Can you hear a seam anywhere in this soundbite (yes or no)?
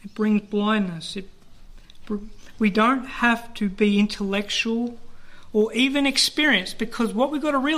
no